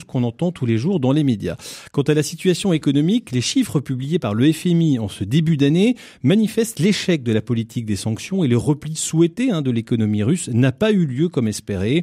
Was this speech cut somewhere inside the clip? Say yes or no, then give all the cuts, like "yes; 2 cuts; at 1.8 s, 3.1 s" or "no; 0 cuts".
no; 0 cuts